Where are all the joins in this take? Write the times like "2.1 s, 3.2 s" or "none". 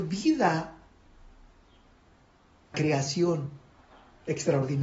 2.7 s